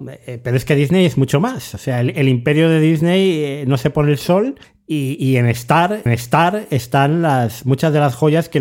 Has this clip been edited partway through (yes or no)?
yes